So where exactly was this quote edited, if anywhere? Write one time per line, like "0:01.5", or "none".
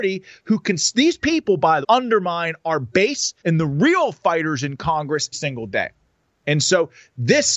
0:01.8
0:03.4
0:05.3